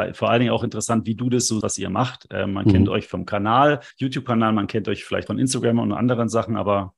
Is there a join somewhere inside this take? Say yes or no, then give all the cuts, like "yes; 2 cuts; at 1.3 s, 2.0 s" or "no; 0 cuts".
yes; 3 cuts; at 1.6 s, 3.9 s, 5.3 s